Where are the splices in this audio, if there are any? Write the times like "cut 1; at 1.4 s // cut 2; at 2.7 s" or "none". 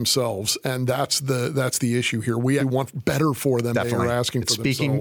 cut 1; at 2.6 s // cut 2; at 3.7 s